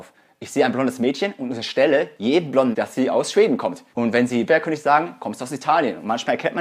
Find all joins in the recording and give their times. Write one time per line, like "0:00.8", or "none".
0:02.7
0:03.9
0:04.5